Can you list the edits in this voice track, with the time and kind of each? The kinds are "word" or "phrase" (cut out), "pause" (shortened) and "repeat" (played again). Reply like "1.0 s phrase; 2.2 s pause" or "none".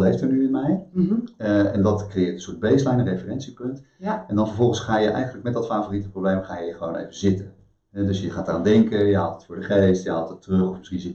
none